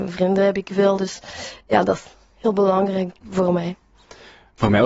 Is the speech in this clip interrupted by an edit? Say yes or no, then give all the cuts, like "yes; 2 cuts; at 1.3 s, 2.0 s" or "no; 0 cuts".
no; 0 cuts